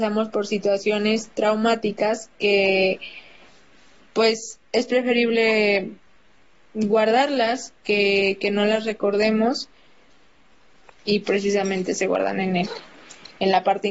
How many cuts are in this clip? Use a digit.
1